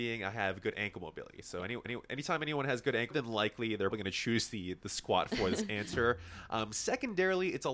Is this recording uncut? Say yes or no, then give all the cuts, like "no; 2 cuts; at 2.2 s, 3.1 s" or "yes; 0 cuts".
no; 3 cuts; at 1.9 s, 3.1 s, 3.9 s